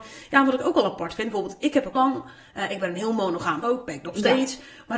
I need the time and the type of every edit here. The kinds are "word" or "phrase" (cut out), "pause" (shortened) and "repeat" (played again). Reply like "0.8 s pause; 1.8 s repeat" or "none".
1.9 s word; 3.6 s word